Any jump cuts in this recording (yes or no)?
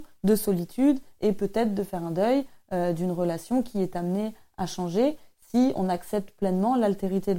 no